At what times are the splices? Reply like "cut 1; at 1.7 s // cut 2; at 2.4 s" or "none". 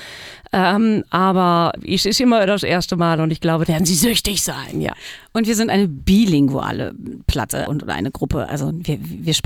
cut 1; at 1.8 s // cut 2; at 3.7 s // cut 3; at 7.7 s